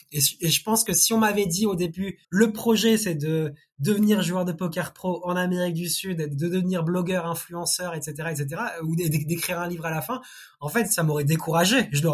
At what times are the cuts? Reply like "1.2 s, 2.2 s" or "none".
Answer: 2.2 s